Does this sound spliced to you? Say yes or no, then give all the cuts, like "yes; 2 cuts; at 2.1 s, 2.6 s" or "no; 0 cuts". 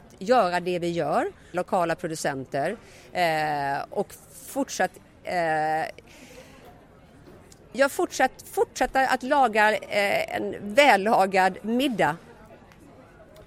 yes; 1 cut; at 1.5 s